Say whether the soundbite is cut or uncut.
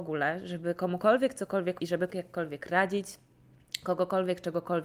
cut